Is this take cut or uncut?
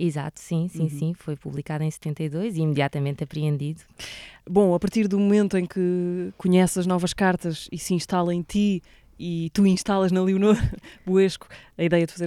uncut